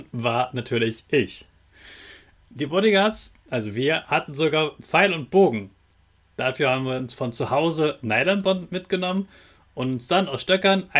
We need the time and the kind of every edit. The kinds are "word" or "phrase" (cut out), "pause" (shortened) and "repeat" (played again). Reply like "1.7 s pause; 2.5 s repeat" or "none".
none